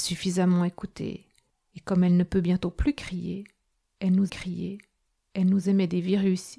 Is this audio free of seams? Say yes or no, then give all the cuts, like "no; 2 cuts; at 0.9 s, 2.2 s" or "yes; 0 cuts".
no; 1 cut; at 4.3 s